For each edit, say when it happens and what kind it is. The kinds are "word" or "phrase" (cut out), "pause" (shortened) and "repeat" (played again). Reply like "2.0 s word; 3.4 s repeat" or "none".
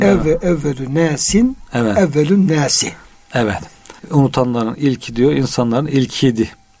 4.0 s pause